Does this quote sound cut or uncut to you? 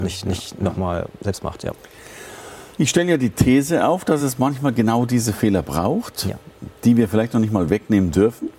uncut